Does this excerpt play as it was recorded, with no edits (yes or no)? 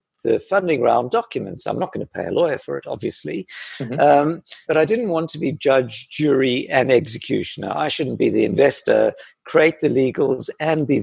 no